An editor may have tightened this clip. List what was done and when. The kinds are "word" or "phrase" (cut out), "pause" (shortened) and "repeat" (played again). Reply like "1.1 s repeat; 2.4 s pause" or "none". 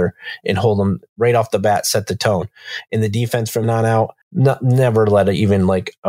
3.6 s word; 4.2 s pause

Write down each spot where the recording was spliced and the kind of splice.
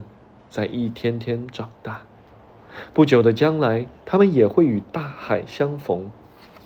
4.0 s pause

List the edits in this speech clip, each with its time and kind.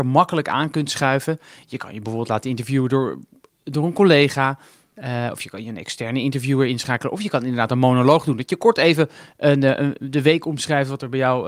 none

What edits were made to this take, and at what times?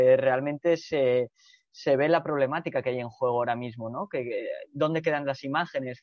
none

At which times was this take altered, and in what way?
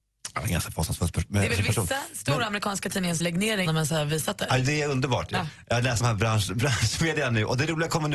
3.2 s word; 3.7 s word; 6.0 s word

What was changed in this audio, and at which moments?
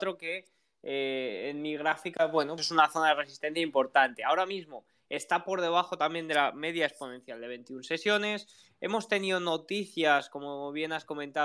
2.6 s word

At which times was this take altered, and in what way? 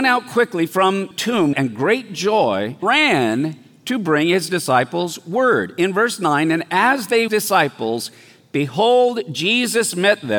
1.1 s word; 1.5 s phrase; 2.8 s word; 7.3 s phrase

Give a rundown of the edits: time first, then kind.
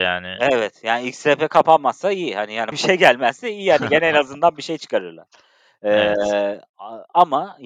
2.7 s word

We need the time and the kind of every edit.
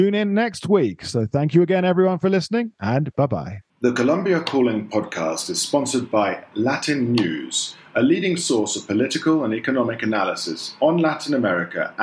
3.7 s pause

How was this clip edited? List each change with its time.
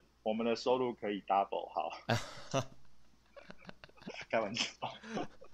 none

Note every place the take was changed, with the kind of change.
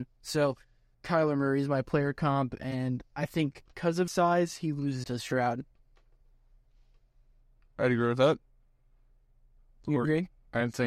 0.9 s word; 4.1 s word; 5.0 s word

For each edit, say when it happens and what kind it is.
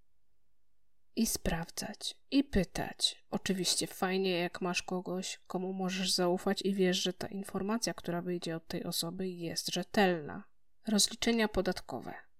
none

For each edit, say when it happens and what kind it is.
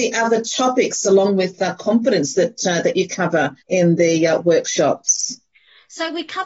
3.6 s pause

